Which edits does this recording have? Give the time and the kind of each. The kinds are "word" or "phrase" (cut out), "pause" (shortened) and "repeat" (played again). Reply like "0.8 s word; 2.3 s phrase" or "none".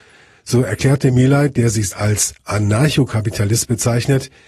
1.9 s word